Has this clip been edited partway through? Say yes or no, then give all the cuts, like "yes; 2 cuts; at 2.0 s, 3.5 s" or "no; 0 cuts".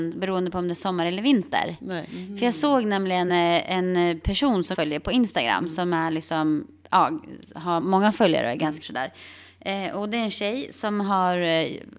yes; 4 cuts; at 3.3 s, 4.7 s, 7.8 s, 8.8 s